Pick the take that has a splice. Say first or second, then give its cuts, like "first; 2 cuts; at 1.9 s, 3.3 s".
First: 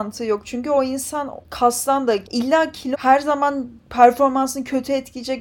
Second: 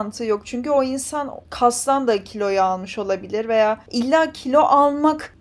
first; 2 cuts; at 2.2 s, 2.9 s